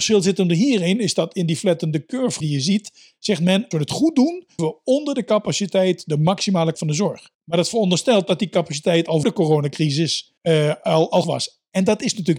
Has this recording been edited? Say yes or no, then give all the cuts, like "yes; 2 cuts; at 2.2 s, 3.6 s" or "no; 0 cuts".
yes; 8 cuts; at 2.4 s, 3.7 s, 4.6 s, 6.7 s, 7.3 s, 9.2 s, 10.4 s, 11.2 s